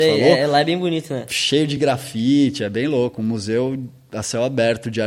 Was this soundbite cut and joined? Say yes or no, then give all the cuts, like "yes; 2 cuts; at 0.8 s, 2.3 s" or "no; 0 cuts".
no; 0 cuts